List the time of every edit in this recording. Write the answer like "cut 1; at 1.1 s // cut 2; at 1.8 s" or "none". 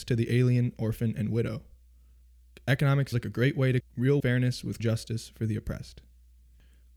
cut 1; at 3.1 s // cut 2; at 3.8 s // cut 3; at 4.2 s // cut 4; at 4.8 s